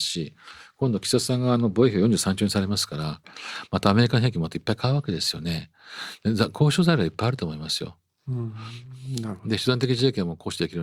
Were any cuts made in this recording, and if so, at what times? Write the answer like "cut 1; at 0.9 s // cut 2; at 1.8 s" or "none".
none